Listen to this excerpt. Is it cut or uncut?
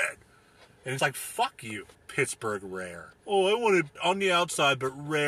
cut